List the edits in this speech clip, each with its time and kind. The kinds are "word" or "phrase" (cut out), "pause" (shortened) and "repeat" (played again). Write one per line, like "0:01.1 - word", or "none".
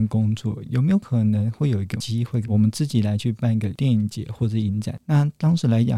0:02.4 - phrase